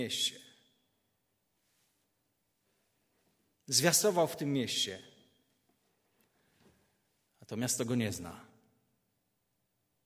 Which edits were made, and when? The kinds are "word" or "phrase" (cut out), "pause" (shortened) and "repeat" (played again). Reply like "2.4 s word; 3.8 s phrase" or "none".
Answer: none